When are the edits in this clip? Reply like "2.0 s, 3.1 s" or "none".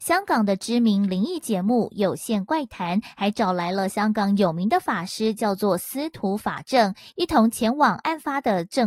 none